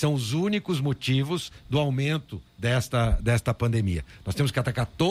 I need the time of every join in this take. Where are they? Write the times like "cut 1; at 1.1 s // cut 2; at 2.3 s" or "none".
cut 1; at 2.5 s

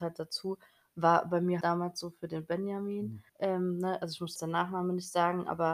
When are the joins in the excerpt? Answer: cut 1; at 1.6 s // cut 2; at 3.3 s // cut 3; at 4.4 s

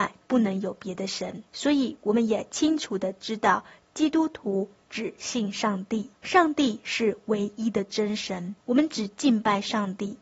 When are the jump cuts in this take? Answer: cut 1; at 1.5 s // cut 2; at 6.1 s // cut 3; at 8.6 s

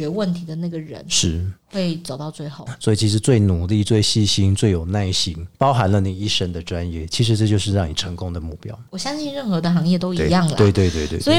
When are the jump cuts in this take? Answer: cut 1; at 8.9 s

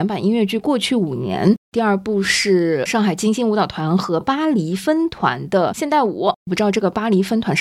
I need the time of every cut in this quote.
none

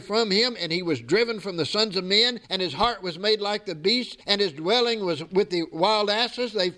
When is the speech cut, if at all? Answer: cut 1; at 2.4 s // cut 2; at 4.2 s

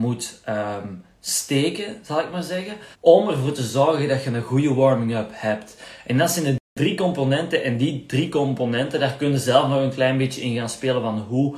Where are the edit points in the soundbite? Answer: cut 1; at 2.9 s

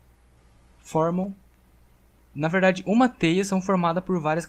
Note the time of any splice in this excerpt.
none

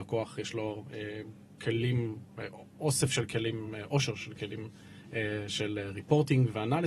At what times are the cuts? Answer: none

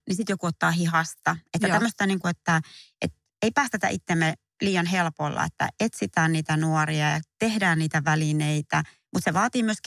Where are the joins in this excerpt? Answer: none

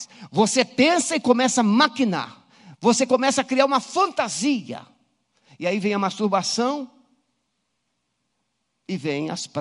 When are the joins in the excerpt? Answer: none

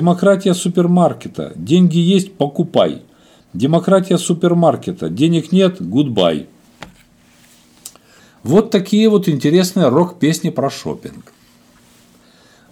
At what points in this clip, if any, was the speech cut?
none

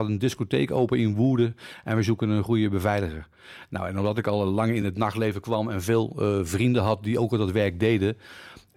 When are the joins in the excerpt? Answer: none

